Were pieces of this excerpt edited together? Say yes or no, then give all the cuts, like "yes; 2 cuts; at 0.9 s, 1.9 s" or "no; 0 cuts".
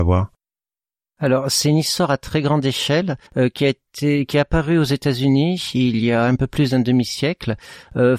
yes; 1 cut; at 3.3 s